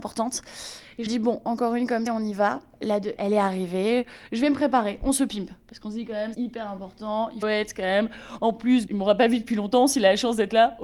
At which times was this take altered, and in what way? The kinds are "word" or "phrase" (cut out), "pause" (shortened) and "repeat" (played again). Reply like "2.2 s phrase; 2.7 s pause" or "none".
1.1 s word; 2.1 s word; 3.2 s word; 6.3 s word; 7.4 s word; 8.9 s word